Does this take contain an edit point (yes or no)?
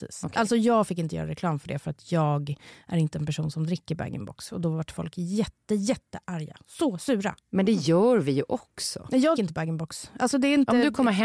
yes